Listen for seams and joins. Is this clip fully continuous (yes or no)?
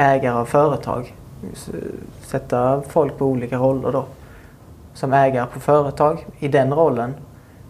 yes